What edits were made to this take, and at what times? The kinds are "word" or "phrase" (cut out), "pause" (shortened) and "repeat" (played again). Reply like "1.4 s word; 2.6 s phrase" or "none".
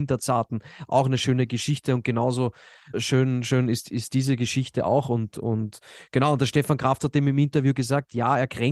2.9 s word